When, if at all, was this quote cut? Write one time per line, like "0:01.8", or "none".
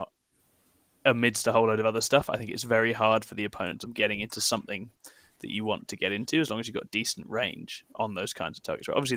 0:03.8